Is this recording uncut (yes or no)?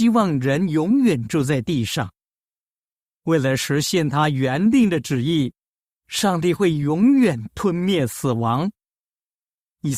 yes